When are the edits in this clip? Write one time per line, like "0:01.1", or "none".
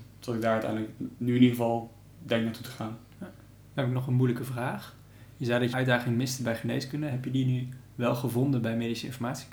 0:01.2
0:05.7